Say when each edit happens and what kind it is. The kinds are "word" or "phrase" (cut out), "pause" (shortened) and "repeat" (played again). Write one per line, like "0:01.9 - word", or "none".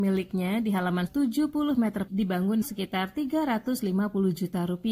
0:01.1 - word
0:02.1 - word
0:02.6 - phrase